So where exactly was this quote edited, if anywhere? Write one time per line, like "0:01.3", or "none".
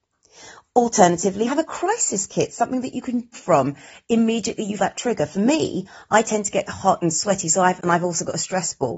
0:01.5
0:03.3
0:04.8
0:06.7
0:07.8